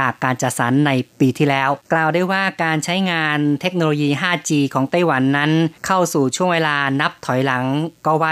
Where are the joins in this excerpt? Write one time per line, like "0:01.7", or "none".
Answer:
0:01.8
0:05.8